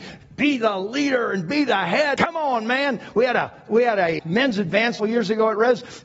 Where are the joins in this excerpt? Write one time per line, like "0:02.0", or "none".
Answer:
0:02.2
0:04.2
0:05.0